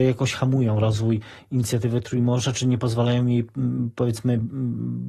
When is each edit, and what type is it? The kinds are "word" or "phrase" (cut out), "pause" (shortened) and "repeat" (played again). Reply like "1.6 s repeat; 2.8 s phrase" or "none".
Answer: none